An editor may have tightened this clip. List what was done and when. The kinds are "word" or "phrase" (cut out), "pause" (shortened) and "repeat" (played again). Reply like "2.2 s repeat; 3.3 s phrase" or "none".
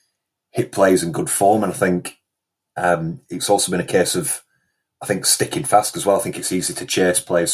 none

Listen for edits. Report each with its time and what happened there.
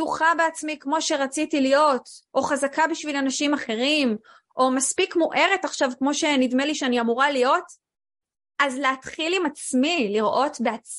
none

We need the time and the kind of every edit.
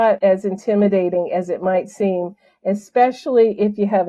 none

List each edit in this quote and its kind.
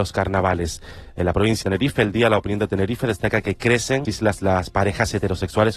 1.6 s phrase; 4.1 s phrase

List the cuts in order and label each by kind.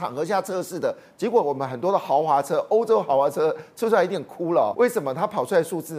4.7 s word

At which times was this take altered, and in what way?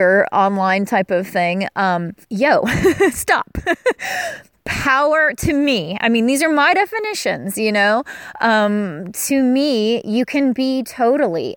2.2 s pause

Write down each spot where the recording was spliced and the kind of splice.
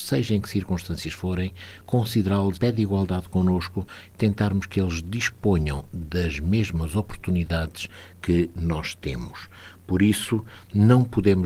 2.5 s word

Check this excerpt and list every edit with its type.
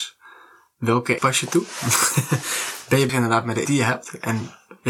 1.2 s word; 3.1 s word; 3.7 s word

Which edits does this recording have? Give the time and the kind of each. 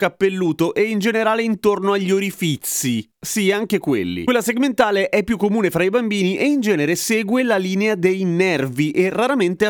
3.1 s pause

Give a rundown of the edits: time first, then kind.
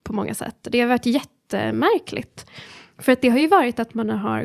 none

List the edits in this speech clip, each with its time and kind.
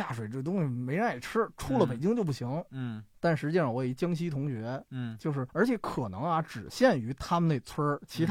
3.1 s pause; 5.5 s pause

